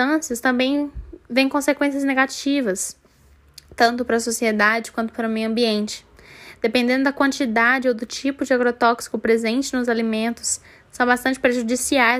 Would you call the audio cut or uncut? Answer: uncut